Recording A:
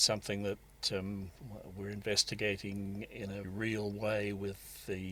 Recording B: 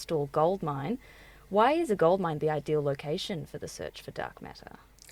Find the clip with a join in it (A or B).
A